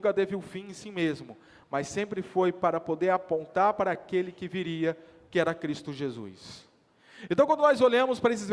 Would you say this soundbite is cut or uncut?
uncut